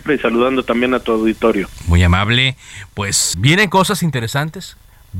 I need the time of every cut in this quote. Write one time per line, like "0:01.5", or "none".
0:03.3